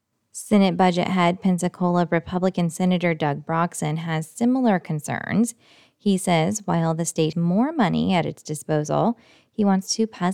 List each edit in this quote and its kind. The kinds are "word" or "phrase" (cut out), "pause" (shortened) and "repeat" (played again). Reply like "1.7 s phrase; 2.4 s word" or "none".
7.3 s word